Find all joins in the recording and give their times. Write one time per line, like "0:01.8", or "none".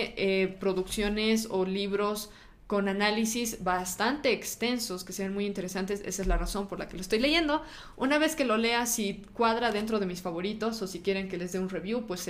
none